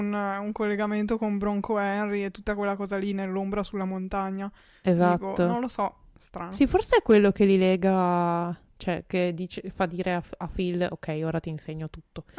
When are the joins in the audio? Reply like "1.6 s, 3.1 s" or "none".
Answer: none